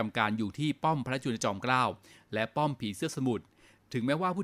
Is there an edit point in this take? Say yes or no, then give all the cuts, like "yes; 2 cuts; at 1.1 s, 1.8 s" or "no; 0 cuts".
no; 0 cuts